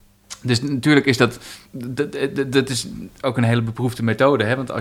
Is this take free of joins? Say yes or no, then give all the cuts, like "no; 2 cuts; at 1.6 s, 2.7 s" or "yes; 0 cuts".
no; 1 cut; at 1.7 s